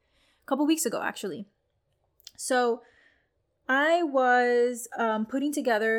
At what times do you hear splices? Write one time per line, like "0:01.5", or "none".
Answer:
none